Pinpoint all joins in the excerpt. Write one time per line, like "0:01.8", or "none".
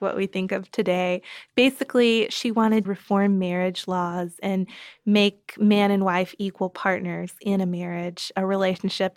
0:02.8